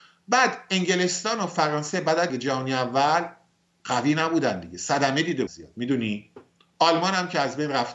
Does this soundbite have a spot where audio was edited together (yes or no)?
yes